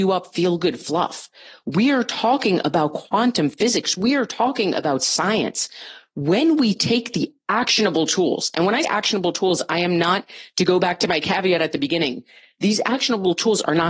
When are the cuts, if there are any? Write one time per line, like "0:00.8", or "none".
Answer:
0:08.8